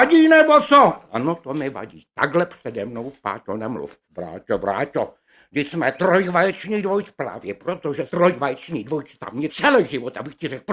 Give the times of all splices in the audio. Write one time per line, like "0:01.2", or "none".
0:04.0
0:08.1
0:09.5